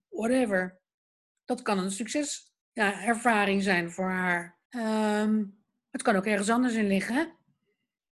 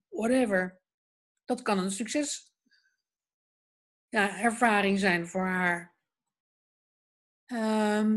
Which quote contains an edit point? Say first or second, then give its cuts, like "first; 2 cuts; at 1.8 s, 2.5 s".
first; 2 cuts; at 2.6 s, 4.7 s